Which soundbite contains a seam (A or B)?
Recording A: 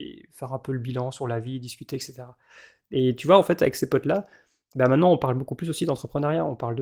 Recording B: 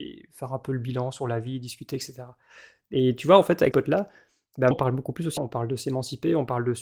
B